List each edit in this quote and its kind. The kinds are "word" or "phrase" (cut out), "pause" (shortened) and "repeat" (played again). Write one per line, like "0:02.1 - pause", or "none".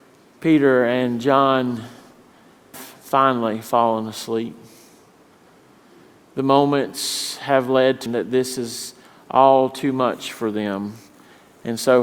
0:02.7 - word
0:08.1 - word